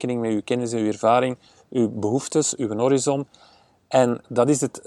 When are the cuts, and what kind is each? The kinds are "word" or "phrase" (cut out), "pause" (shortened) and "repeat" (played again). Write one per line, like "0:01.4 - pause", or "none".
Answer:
none